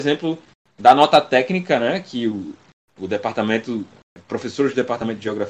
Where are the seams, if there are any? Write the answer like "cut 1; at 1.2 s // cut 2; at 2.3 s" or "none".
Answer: none